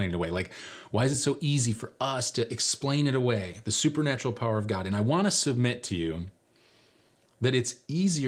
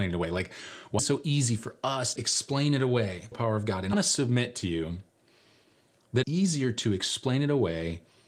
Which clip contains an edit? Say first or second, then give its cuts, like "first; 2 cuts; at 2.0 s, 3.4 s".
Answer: second; 5 cuts; at 1.0 s, 2.2 s, 3.3 s, 3.9 s, 6.2 s